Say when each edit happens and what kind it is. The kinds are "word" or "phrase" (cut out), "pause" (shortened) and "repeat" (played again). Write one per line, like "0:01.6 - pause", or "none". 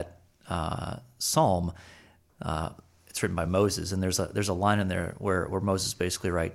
none